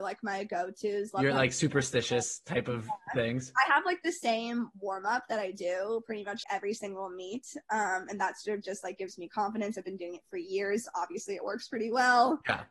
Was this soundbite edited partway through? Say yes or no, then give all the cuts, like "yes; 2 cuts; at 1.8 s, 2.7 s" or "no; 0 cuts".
yes; 1 cut; at 6.4 s